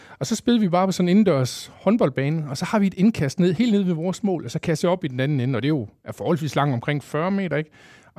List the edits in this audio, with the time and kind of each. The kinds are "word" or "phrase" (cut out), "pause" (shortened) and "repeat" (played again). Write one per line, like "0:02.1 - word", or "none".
none